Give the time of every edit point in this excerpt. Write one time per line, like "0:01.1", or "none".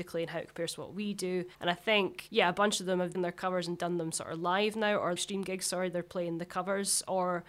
0:01.5
0:03.1
0:05.2

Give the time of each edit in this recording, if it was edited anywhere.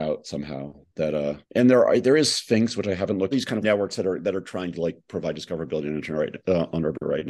0:01.4
0:03.3
0:03.6

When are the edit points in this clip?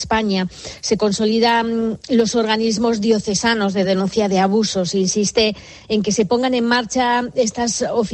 none

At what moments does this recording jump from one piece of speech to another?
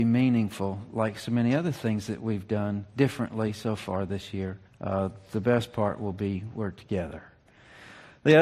0:04.6

